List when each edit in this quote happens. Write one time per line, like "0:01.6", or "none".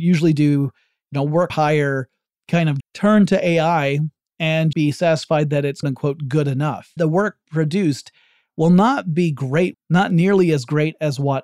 0:01.5
0:02.8
0:04.7
0:05.8
0:07.0
0:09.7